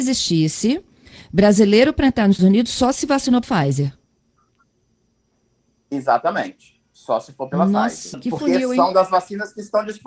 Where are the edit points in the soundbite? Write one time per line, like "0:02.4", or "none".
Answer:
0:02.4
0:03.4
0:08.1